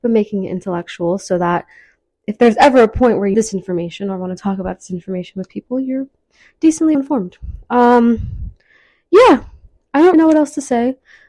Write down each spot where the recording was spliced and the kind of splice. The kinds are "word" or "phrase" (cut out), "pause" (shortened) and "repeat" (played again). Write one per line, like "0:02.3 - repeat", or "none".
0:03.3 - word
0:06.9 - word
0:10.1 - word